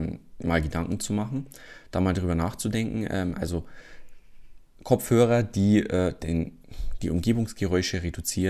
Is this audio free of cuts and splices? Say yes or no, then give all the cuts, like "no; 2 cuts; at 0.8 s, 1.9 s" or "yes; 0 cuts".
yes; 0 cuts